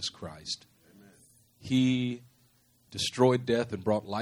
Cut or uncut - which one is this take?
cut